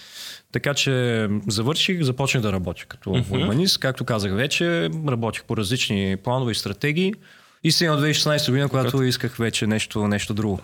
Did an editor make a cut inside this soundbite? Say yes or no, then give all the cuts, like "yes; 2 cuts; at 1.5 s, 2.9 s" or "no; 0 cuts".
no; 0 cuts